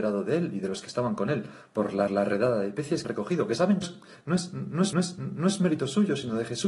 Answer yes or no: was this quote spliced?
yes